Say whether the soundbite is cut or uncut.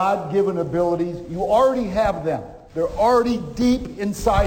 cut